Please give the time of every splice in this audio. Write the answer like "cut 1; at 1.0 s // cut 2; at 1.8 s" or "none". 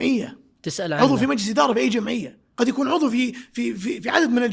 none